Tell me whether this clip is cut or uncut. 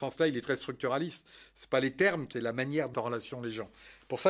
cut